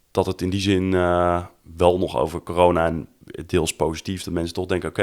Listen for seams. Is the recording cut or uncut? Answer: uncut